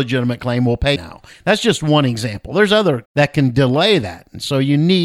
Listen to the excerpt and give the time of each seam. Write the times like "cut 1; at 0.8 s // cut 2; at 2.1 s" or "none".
cut 1; at 1.0 s // cut 2; at 3.0 s